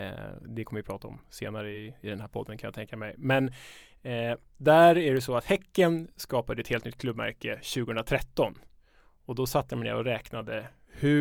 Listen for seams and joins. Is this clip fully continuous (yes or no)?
yes